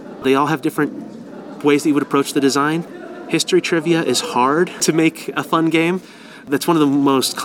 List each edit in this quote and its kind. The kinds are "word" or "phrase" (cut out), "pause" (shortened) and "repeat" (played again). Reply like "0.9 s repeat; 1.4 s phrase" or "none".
none